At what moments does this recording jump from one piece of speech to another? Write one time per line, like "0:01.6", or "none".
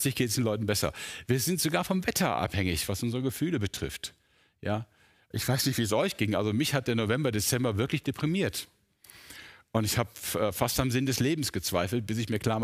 none